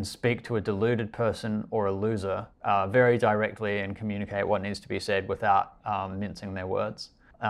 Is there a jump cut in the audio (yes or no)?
yes